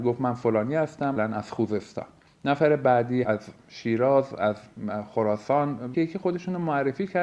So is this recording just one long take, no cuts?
no; 4 cuts; at 1.2 s, 2.3 s, 3.2 s, 5.9 s

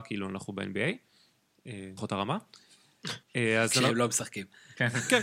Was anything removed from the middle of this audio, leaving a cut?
yes; 2 cuts; at 2.0 s, 3.2 s

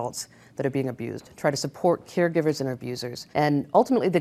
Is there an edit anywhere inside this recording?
yes; 1 cut; at 3.3 s

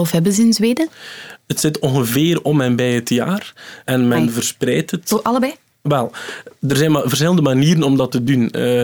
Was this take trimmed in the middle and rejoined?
no; 0 cuts

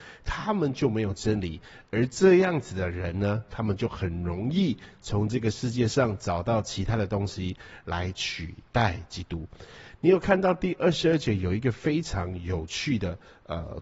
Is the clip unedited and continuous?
yes; 0 cuts

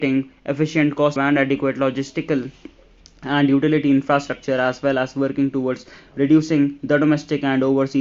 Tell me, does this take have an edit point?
yes; 1 cut; at 1.2 s

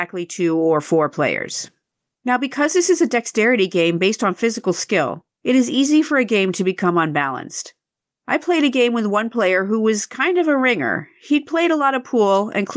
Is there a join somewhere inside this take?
no; 0 cuts

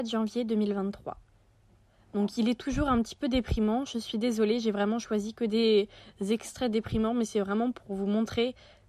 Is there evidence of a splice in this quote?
no; 0 cuts

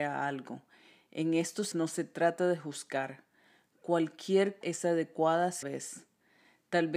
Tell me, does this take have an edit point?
yes; 3 cuts; at 1.7 s, 4.6 s, 5.6 s

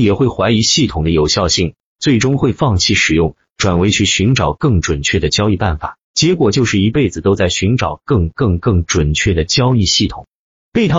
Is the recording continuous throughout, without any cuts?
no; 1 cut; at 6.0 s

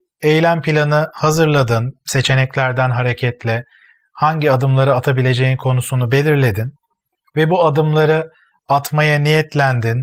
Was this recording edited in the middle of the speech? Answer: no; 0 cuts

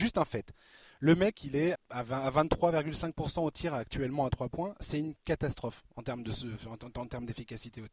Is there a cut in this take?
yes; 1 cut; at 1.8 s

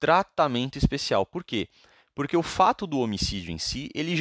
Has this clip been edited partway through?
no; 0 cuts

